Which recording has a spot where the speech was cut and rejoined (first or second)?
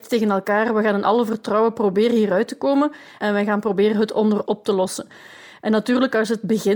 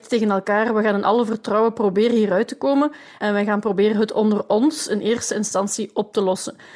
first